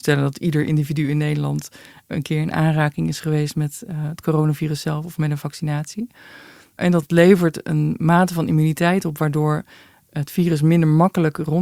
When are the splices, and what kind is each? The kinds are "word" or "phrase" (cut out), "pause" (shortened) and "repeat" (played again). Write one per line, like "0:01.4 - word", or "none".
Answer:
none